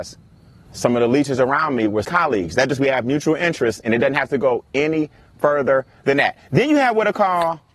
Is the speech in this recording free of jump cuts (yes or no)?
no